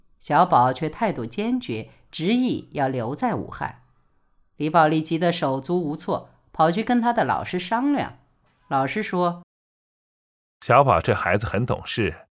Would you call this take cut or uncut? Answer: uncut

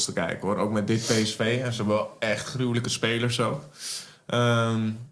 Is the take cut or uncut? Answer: uncut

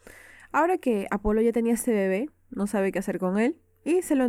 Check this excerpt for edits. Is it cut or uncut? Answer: uncut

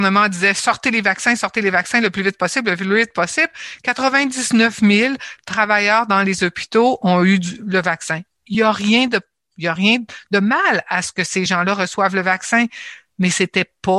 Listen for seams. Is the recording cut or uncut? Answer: uncut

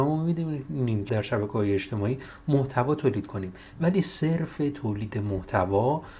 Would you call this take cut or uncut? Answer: cut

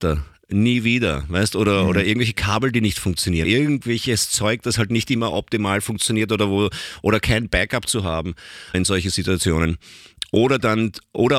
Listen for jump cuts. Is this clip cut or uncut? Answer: cut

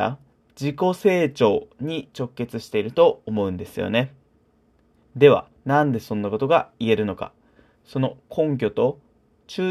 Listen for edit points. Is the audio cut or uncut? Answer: uncut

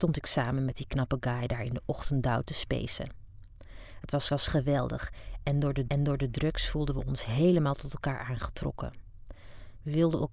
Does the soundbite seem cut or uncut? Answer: cut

